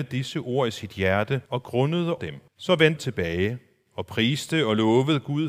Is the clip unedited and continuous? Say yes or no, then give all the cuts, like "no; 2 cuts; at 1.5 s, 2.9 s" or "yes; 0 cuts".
no; 4 cuts; at 1.5 s, 2.2 s, 2.5 s, 3.0 s